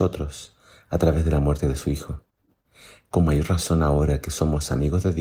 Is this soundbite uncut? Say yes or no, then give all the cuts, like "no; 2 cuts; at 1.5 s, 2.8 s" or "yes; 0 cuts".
yes; 0 cuts